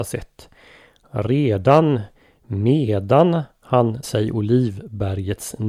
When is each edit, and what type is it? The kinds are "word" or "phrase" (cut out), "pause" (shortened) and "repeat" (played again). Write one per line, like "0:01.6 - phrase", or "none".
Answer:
0:04.0 - word